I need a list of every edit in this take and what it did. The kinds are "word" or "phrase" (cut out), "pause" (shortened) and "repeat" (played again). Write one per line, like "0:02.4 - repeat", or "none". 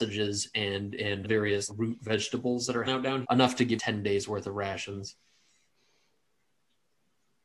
0:01.2 - word
0:01.7 - word
0:02.8 - word
0:03.2 - word
0:03.8 - phrase